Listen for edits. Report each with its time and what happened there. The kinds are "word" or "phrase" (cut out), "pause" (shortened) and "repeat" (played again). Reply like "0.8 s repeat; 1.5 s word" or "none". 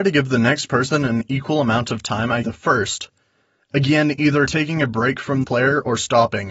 2.4 s word; 5.4 s word